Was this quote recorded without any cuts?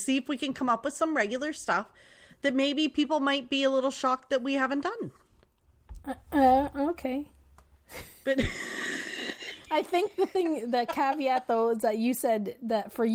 yes; 0 cuts

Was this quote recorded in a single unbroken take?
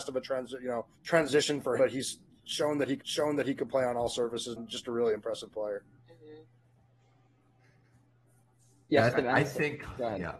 no; 6 cuts; at 0.9 s, 1.8 s, 3.0 s, 4.6 s, 6.0 s, 9.1 s

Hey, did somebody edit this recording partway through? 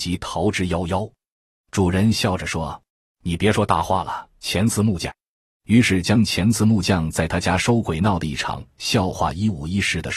yes; 2 cuts; at 2.9 s, 4.3 s

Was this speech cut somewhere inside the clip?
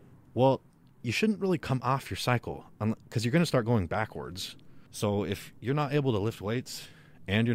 yes; 1 cut; at 4.9 s

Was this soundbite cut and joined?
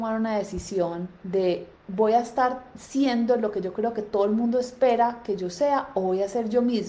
yes; 1 cut; at 1.8 s

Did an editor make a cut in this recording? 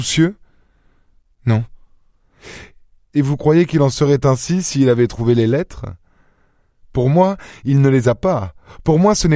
no; 0 cuts

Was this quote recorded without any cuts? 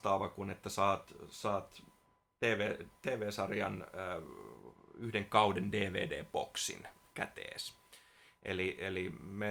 yes; 0 cuts

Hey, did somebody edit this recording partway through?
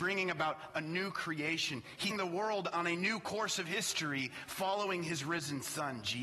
yes; 1 cut; at 2.1 s

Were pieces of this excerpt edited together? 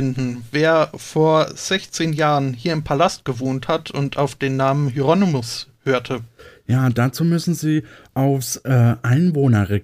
no; 0 cuts

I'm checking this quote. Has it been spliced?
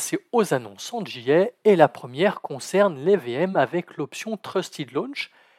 no; 0 cuts

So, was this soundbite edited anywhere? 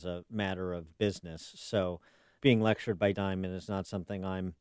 yes; 3 cuts; at 0.9 s, 2.4 s, 3.1 s

